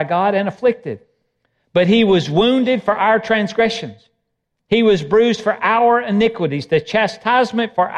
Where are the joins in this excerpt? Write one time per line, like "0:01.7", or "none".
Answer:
none